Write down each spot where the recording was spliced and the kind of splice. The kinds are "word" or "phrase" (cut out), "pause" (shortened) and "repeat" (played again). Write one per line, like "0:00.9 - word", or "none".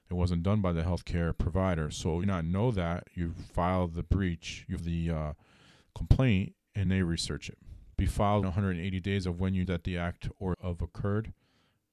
0:02.2 - phrase
0:04.8 - word
0:06.9 - word
0:07.9 - pause
0:08.4 - word
0:09.6 - word
0:10.5 - phrase